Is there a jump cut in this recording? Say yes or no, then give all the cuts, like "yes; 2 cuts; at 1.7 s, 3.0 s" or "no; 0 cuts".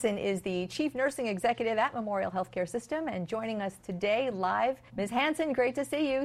yes; 1 cut; at 4.9 s